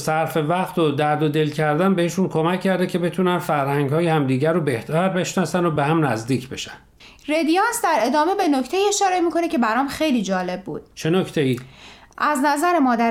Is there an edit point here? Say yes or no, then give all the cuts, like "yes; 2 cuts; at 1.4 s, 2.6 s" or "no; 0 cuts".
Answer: no; 0 cuts